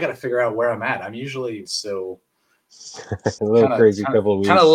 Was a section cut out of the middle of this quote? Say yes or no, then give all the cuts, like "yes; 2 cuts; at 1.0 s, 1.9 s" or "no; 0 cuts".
yes; 2 cuts; at 1.7 s, 3.4 s